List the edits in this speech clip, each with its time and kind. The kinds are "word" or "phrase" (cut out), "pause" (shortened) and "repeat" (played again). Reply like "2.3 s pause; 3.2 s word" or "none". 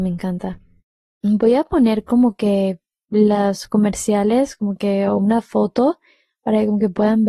none

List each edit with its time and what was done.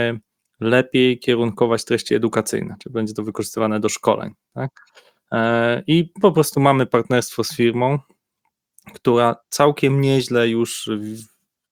none

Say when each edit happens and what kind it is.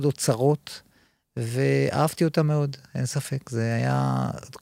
none

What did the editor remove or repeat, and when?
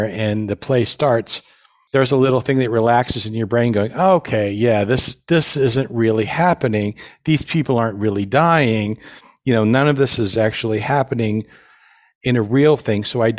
none

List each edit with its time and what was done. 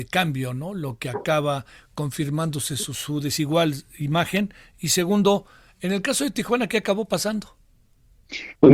none

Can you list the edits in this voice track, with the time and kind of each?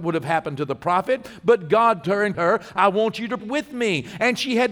2.0 s word; 2.3 s word; 3.4 s word

